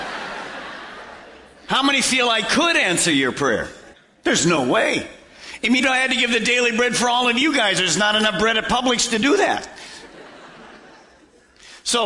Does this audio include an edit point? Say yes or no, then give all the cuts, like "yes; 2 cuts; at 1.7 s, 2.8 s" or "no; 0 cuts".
yes; 2 cuts; at 3.9 s, 5.8 s